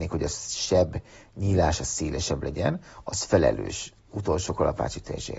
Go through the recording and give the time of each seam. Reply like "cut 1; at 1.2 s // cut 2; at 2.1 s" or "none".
none